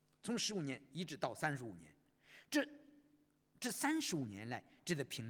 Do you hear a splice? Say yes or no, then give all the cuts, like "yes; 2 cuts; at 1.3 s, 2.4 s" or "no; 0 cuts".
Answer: no; 0 cuts